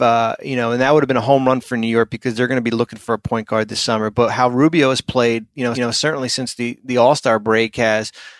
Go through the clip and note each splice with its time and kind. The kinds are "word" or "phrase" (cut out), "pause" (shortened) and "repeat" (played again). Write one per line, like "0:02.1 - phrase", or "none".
0:05.7 - repeat

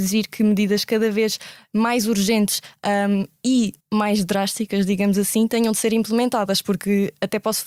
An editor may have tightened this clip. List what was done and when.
0:03.8 - pause

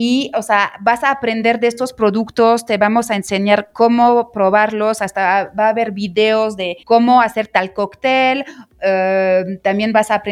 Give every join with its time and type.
0:06.8 - pause

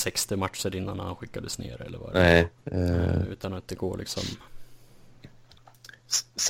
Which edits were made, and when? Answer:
0:02.6 - pause

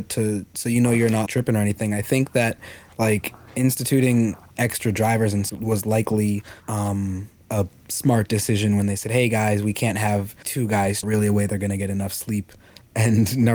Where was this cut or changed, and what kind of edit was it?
0:01.3 - word
0:05.5 - word
0:06.6 - pause
0:10.4 - word
0:11.0 - phrase

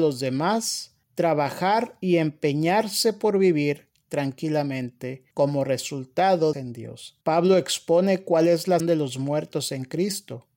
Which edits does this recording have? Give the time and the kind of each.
0:01.0 - pause
0:05.3 - pause
0:06.5 - phrase
0:07.2 - pause
0:08.8 - word

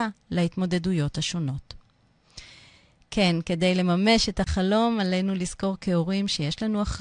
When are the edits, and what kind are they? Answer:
none

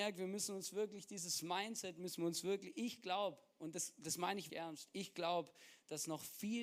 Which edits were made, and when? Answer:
0:04.5 - word

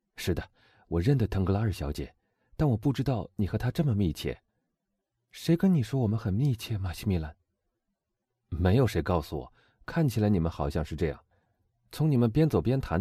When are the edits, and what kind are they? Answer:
0:04.5 - pause

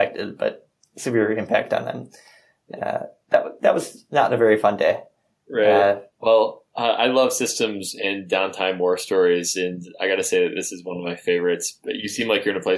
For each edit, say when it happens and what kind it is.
none

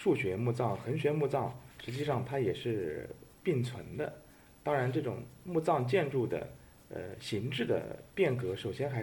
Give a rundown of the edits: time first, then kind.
none

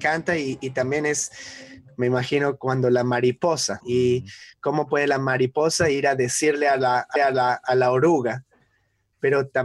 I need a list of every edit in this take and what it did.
0:03.8 - phrase
0:07.2 - repeat

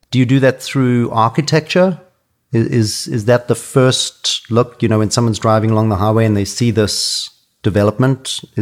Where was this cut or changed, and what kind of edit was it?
none

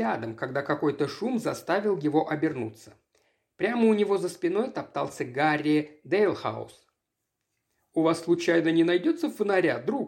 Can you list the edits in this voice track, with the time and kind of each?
none

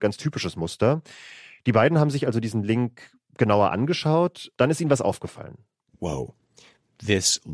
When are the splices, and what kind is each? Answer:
0:04.5 - word

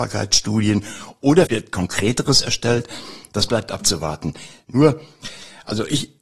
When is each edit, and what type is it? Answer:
0:01.5 - phrase

